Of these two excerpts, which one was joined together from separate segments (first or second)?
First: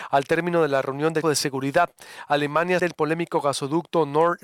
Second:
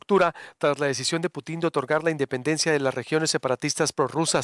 first